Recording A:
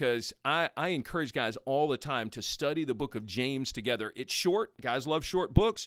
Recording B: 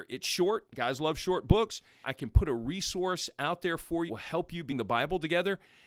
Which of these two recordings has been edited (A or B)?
B